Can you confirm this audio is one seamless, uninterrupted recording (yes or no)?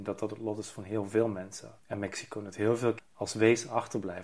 no